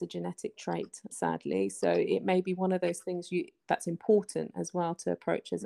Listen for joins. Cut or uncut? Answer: cut